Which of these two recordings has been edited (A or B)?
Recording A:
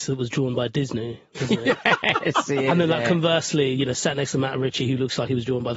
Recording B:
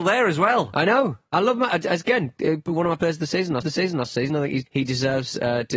B